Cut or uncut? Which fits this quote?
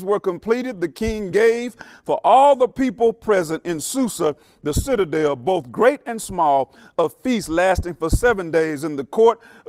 uncut